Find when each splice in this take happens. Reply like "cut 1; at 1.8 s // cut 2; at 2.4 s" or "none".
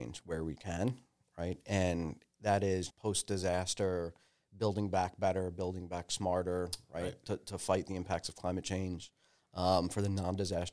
none